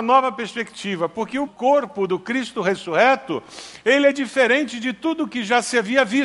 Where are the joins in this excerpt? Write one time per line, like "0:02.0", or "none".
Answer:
0:01.5